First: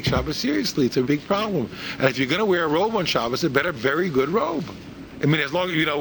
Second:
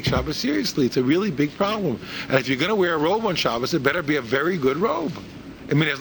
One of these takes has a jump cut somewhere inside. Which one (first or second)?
first